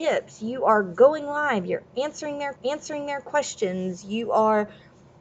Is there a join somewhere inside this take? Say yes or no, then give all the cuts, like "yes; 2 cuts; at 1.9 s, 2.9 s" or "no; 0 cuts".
yes; 1 cut; at 2.6 s